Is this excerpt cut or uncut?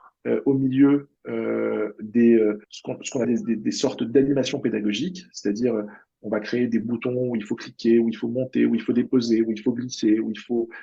cut